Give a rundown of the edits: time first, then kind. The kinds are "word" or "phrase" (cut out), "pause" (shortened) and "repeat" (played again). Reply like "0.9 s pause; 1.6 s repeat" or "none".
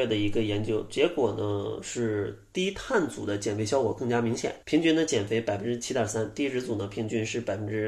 4.6 s pause